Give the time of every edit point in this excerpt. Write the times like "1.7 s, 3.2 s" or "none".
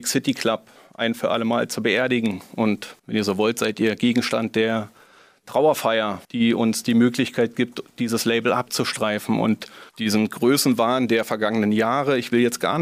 3.0 s, 6.2 s, 9.9 s